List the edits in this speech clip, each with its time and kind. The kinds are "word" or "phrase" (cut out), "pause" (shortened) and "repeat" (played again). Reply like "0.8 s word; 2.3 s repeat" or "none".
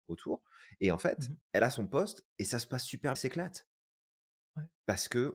1.4 s pause; 3.2 s phrase